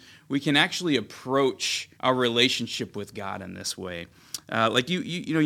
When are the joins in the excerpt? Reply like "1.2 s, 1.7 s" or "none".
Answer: 1.9 s